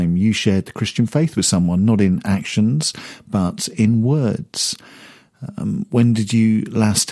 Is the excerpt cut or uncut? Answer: uncut